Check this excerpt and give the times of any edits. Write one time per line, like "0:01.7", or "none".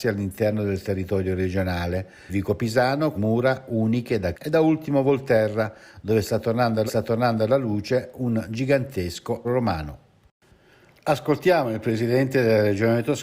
0:02.3
0:03.1
0:04.3
0:06.9
0:09.4